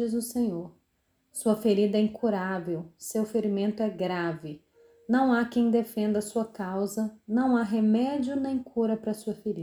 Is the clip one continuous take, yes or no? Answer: yes